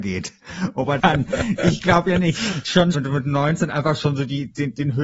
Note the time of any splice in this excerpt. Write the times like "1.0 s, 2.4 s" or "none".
1.0 s, 2.9 s